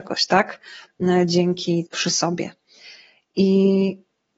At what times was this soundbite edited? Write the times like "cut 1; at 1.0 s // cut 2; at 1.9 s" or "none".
cut 1; at 1.9 s